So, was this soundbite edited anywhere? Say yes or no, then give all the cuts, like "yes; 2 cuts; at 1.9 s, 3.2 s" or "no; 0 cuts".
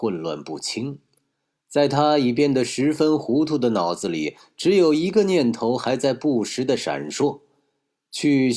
no; 0 cuts